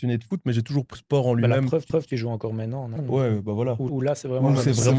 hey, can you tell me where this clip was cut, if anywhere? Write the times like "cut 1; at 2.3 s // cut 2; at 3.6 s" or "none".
cut 1; at 0.9 s // cut 2; at 1.9 s // cut 3; at 3.0 s // cut 4; at 3.9 s